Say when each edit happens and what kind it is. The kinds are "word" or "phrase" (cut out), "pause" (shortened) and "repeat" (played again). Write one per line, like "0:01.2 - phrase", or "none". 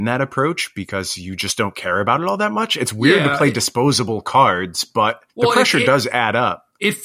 0:05.3 - pause